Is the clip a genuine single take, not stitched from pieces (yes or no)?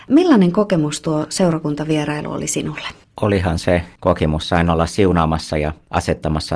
no